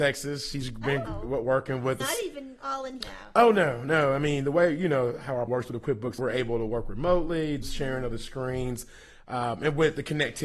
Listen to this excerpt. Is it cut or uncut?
cut